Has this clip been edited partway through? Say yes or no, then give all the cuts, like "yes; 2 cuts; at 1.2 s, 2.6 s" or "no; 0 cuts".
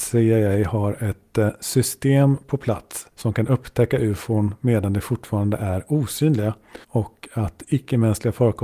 yes; 2 cuts; at 3.1 s, 6.8 s